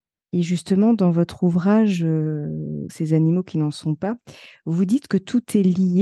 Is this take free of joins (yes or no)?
no